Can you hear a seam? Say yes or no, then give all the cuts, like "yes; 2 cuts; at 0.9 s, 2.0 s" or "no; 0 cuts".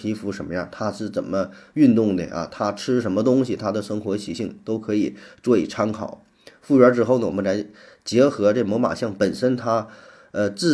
no; 0 cuts